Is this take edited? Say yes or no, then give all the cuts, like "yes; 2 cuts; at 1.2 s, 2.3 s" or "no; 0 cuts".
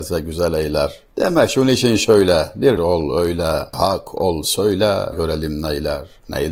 yes; 3 cuts; at 2.8 s, 3.7 s, 5.1 s